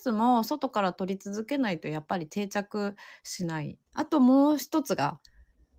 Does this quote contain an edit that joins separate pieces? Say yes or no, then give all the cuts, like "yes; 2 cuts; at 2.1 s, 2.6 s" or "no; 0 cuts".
yes; 1 cut; at 3.9 s